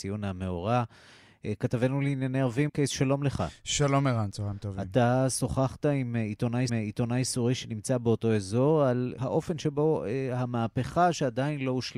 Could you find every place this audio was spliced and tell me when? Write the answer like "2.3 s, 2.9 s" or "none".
2.7 s, 6.7 s, 9.2 s